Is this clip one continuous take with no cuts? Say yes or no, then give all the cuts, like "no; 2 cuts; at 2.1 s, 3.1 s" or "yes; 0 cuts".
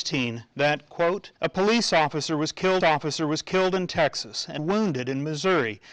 no; 3 cuts; at 1.4 s, 2.8 s, 4.6 s